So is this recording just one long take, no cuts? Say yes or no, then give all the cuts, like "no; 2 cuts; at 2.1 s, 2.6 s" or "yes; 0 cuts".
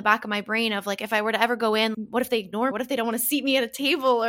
no; 2 cuts; at 1.9 s, 2.7 s